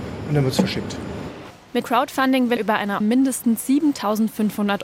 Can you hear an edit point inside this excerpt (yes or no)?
yes